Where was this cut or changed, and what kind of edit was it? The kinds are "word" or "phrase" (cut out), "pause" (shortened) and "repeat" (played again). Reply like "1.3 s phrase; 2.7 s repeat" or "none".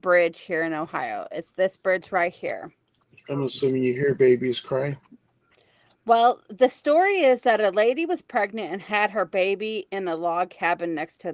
3.0 s pause